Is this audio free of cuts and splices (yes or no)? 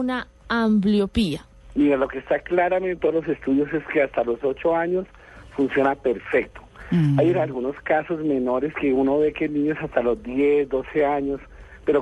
no